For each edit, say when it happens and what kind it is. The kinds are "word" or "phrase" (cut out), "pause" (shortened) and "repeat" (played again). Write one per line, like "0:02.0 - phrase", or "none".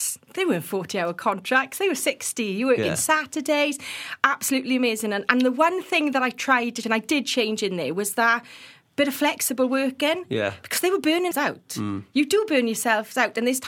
0:06.8 - word
0:11.3 - word